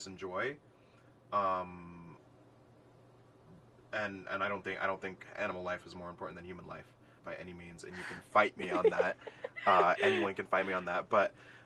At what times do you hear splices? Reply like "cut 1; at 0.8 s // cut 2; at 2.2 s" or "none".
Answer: cut 1; at 7.2 s